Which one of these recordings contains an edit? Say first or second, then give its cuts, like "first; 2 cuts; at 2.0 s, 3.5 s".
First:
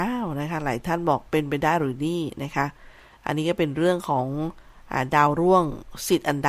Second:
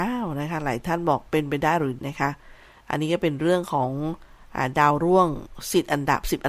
second; 1 cut; at 2.0 s